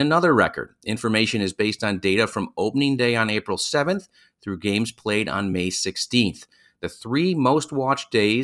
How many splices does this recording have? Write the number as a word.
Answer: zero